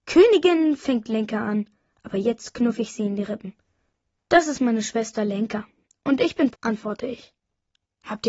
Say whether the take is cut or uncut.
cut